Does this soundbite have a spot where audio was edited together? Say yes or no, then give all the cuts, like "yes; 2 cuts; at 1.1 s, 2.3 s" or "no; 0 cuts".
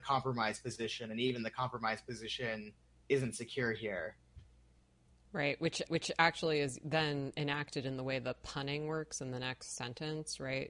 yes; 1 cut; at 5.9 s